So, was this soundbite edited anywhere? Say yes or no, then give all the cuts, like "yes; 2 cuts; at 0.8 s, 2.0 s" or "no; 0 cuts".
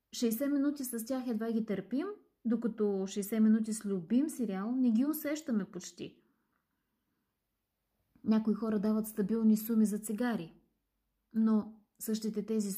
no; 0 cuts